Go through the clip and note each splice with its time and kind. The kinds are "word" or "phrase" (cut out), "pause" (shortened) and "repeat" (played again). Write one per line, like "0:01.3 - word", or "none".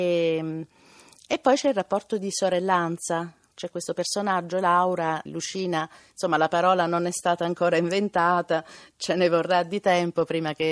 0:05.3 - word